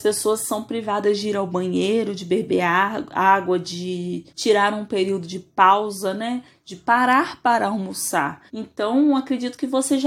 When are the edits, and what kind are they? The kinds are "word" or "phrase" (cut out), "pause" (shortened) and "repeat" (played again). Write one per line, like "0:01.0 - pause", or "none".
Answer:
0:04.3 - pause
0:08.5 - pause